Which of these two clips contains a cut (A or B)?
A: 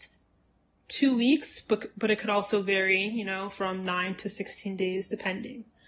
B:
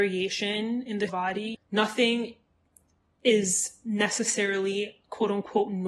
B